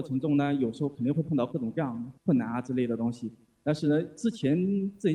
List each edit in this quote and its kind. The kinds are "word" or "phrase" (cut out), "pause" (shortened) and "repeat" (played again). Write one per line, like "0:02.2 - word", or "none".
none